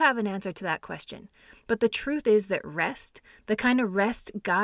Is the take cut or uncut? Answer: uncut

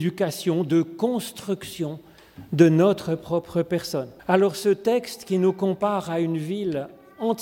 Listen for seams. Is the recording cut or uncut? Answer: cut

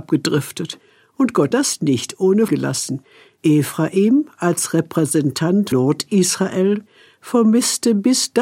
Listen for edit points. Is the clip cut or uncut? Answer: cut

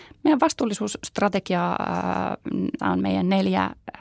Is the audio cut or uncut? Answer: cut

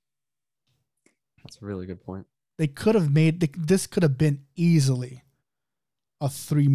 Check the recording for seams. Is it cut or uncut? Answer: uncut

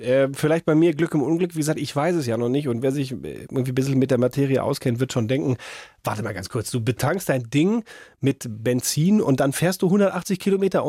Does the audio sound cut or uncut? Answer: uncut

